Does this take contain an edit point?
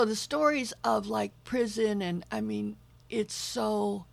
yes; 1 cut; at 3.0 s

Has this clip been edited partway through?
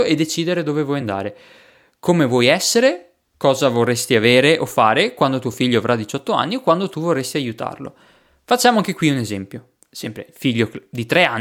no; 0 cuts

